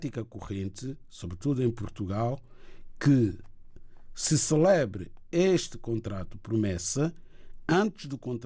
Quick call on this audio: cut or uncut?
uncut